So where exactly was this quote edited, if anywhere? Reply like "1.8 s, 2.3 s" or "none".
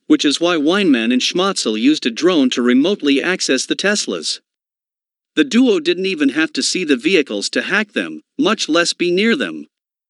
none

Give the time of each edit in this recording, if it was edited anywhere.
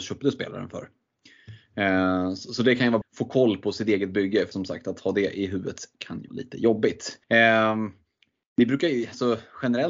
3.0 s, 4.5 s, 6.3 s, 7.2 s

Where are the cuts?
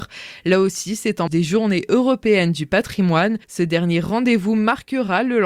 1.3 s, 3.4 s

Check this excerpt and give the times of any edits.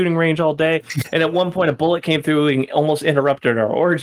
none

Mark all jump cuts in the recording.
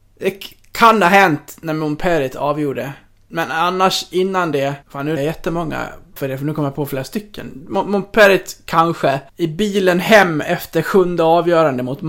4.8 s, 5.2 s, 6.2 s, 9.3 s

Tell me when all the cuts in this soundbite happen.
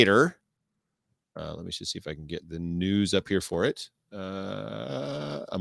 none

